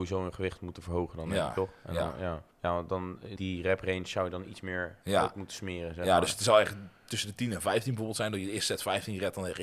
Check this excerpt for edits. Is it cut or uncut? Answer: cut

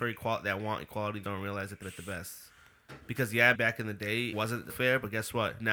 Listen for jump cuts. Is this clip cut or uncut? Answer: cut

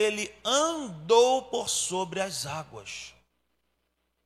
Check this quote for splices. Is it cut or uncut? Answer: uncut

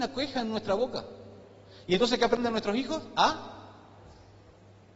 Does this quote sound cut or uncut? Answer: uncut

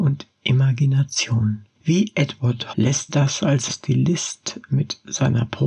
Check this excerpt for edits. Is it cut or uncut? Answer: cut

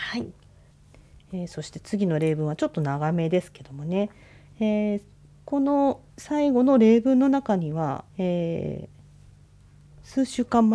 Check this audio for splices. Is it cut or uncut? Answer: cut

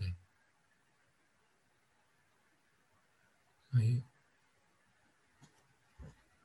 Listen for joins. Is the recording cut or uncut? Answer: uncut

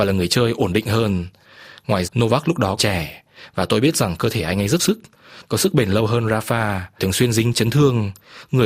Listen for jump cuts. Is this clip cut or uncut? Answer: cut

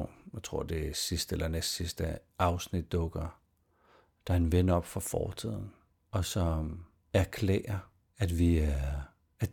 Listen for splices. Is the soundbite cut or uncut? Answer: uncut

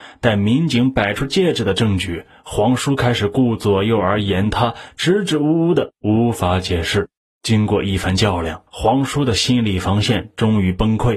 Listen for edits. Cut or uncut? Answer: cut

